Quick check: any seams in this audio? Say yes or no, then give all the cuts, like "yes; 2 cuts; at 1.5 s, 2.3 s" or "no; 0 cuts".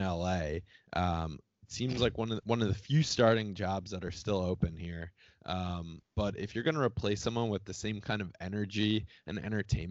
yes; 1 cut; at 6.1 s